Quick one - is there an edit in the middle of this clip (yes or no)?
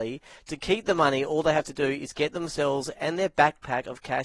no